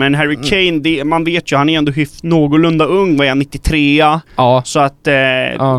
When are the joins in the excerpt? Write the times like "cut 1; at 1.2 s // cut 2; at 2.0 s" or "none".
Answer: cut 1; at 4.3 s